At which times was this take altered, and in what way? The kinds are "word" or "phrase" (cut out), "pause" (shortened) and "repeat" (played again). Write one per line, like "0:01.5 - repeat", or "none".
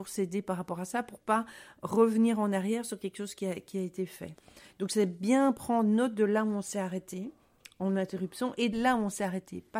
0:08.7 - word